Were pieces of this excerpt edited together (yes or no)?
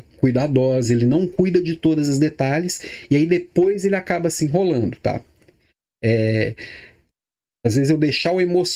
no